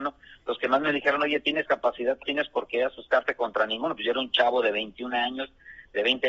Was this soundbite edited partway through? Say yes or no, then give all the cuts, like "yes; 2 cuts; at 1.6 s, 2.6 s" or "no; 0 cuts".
yes; 2 cuts; at 1.6 s, 2.2 s